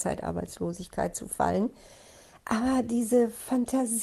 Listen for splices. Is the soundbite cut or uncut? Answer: uncut